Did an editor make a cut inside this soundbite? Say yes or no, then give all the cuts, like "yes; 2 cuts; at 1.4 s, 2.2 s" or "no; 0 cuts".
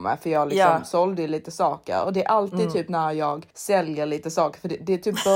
yes; 1 cut; at 3.5 s